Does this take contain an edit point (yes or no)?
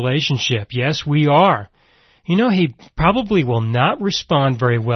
no